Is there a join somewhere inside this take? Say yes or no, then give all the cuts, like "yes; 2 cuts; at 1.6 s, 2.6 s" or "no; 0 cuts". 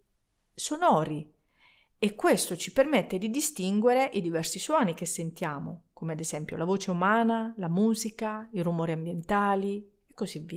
no; 0 cuts